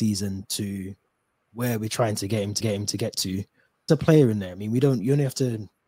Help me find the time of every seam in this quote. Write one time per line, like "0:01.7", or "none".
0:02.6
0:03.9